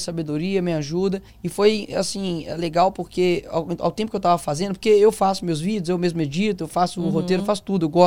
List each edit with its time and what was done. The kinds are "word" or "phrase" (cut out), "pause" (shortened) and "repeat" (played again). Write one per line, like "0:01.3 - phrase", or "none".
0:01.3 - pause